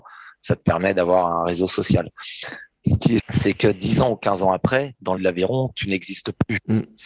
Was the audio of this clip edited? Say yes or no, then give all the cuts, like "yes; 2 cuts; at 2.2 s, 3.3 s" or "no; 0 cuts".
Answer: yes; 2 cuts; at 3.2 s, 5.2 s